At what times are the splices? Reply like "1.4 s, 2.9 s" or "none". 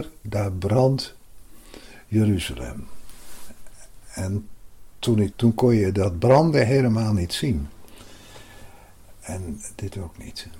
5.3 s